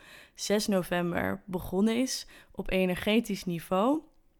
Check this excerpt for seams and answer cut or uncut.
uncut